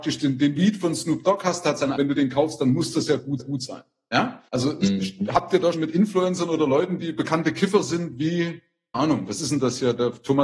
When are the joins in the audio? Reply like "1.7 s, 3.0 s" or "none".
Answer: 2.0 s, 3.4 s, 4.5 s, 5.7 s, 8.9 s